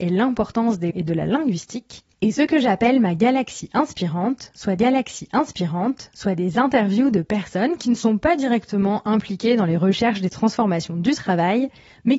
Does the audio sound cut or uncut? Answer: cut